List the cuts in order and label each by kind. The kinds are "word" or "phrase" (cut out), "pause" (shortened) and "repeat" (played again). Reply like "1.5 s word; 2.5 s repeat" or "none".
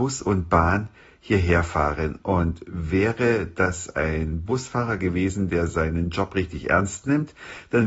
none